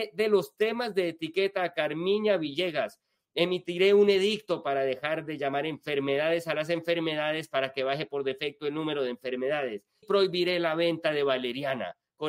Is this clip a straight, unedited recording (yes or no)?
no